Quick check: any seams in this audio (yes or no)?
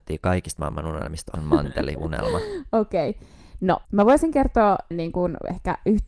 yes